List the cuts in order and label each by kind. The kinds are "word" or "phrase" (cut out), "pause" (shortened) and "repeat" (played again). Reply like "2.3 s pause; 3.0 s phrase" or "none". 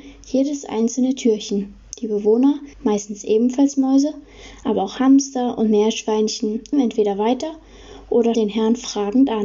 2.7 s pause; 6.7 s word; 8.3 s word